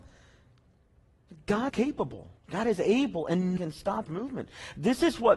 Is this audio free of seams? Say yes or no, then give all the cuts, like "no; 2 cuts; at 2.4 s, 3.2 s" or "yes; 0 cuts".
no; 4 cuts; at 1.7 s, 2.4 s, 3.6 s, 4.1 s